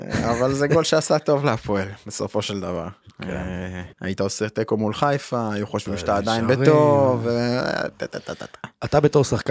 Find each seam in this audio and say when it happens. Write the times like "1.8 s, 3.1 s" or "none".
3.9 s